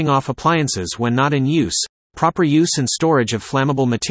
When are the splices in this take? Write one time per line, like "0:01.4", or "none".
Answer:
none